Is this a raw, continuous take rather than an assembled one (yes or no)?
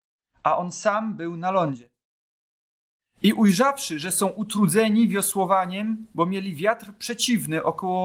no